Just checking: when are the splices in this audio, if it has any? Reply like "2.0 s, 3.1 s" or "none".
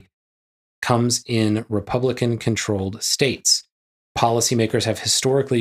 none

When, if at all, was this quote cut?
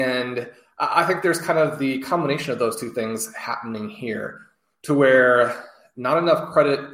none

